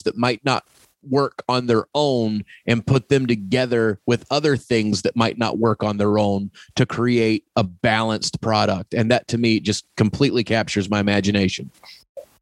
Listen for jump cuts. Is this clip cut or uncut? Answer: uncut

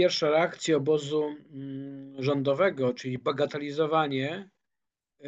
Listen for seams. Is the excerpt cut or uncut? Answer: uncut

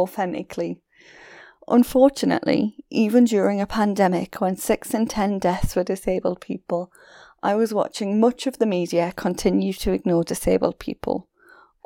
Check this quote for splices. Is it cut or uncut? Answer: uncut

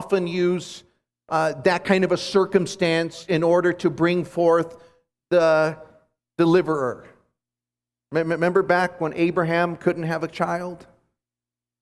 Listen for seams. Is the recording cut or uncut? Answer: uncut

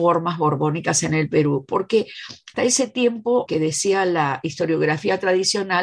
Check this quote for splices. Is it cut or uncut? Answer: cut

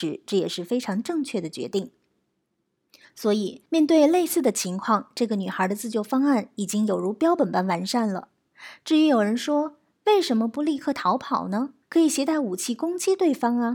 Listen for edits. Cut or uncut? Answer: cut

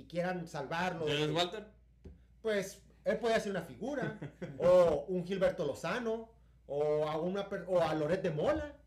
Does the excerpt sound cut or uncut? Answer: uncut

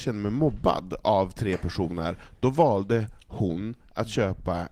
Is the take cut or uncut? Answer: uncut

